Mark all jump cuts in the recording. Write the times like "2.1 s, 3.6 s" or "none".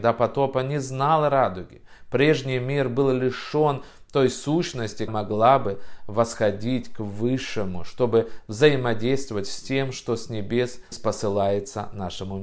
5.1 s, 10.9 s